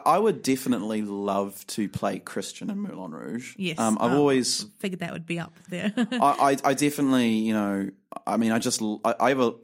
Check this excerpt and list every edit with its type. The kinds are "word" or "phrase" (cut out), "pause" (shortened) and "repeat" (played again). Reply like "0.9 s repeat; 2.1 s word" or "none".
none